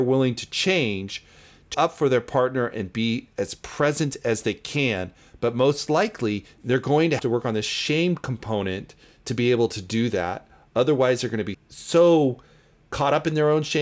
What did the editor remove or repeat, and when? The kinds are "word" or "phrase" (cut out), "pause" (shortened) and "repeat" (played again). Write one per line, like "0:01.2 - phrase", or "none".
0:01.7 - word
0:07.2 - word
0:11.5 - word